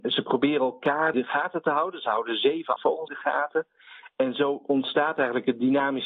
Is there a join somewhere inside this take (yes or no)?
yes